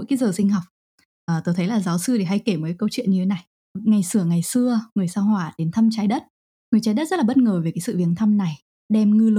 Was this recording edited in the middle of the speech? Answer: no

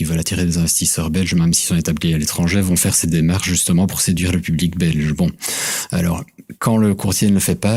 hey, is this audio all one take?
yes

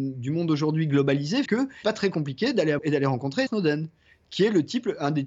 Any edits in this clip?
yes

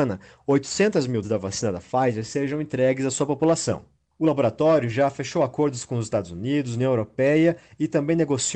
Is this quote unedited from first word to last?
no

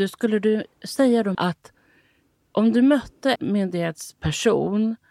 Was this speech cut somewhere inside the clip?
yes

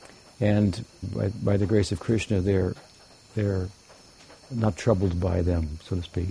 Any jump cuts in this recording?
yes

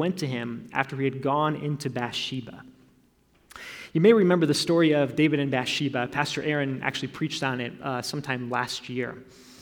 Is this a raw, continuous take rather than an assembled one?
yes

